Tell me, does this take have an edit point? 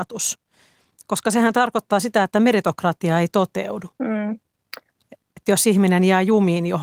yes; 1 cut; at 3.9 s

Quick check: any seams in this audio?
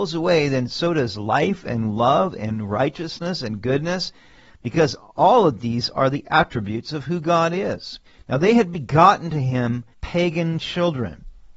yes; 2 cuts; at 8.0 s, 9.9 s

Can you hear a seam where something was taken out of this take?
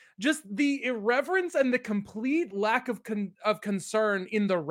no; 0 cuts

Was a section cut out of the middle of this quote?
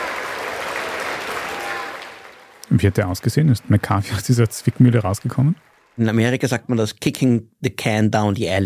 no; 0 cuts

